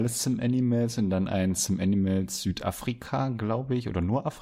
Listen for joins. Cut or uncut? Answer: uncut